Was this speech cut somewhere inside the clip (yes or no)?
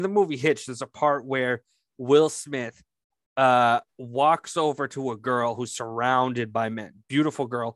no